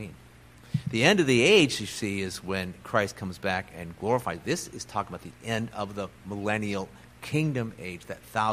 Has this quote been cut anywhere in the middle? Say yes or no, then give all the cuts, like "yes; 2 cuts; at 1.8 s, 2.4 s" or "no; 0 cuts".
no; 0 cuts